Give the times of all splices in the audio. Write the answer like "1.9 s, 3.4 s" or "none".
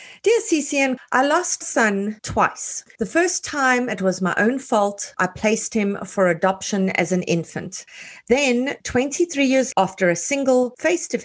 1.0 s, 1.6 s, 9.7 s